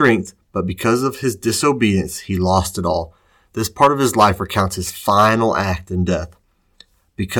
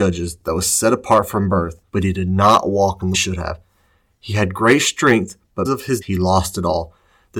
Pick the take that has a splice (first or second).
second